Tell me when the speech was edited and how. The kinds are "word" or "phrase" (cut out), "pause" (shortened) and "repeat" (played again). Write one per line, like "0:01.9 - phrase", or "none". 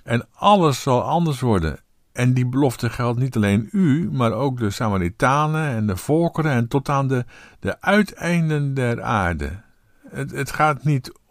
none